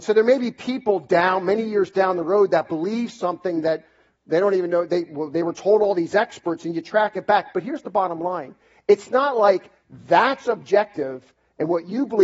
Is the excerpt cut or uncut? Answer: uncut